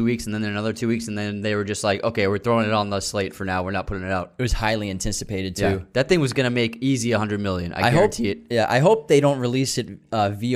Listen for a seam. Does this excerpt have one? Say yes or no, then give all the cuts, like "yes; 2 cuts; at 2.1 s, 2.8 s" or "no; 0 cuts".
no; 0 cuts